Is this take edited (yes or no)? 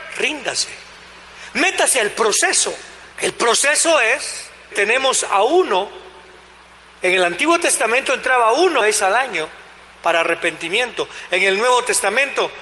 yes